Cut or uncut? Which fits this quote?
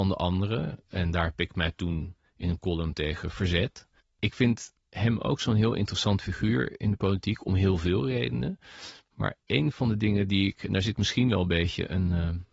cut